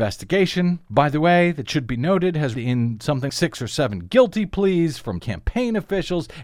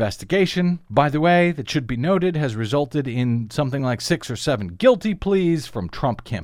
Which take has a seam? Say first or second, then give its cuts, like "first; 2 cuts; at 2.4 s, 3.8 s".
first; 3 cuts; at 2.5 s, 3.3 s, 5.2 s